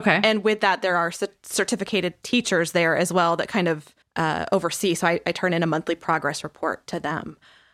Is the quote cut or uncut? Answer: cut